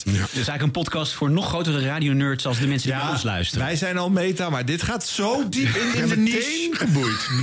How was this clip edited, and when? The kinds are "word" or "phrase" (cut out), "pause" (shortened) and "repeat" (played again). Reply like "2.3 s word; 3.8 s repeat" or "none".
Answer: 5.9 s word